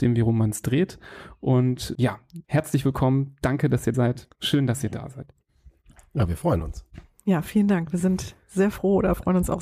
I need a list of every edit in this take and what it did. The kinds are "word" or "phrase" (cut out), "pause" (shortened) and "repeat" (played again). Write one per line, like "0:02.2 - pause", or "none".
0:01.9 - word
0:02.4 - pause
0:03.9 - word